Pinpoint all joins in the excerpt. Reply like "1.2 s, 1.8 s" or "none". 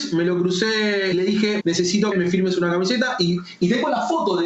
1.1 s, 1.6 s, 2.1 s